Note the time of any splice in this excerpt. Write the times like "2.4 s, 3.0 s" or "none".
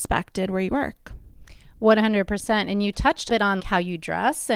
3.3 s, 3.6 s